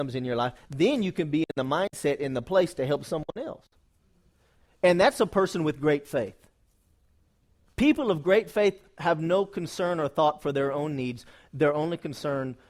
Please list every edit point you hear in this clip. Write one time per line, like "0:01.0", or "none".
none